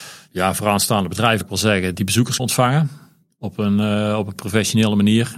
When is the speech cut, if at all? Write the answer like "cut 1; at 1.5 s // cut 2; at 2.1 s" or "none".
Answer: cut 1; at 1.4 s // cut 2; at 1.9 s // cut 3; at 2.4 s